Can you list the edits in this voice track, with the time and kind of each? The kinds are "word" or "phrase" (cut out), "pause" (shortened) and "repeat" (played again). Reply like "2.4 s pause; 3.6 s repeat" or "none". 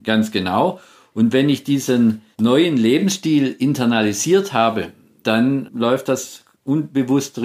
2.3 s pause